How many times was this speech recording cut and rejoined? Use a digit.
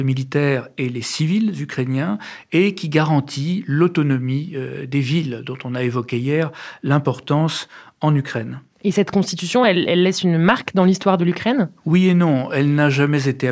0